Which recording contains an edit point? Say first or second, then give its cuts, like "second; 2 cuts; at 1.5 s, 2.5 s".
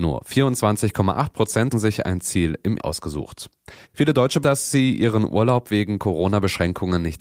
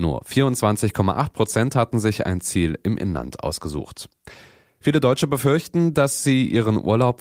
first; 4 cuts; at 1.7 s, 2.8 s, 3.8 s, 4.4 s